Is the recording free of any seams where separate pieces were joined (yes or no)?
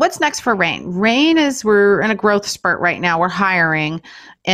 yes